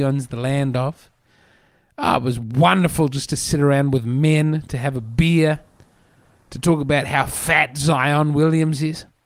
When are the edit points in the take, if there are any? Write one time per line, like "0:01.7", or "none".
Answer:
none